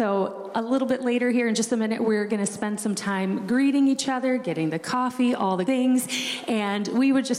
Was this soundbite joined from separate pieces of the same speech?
yes; 1 cut; at 5.7 s

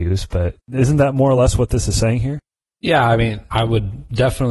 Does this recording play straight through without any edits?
yes; 0 cuts

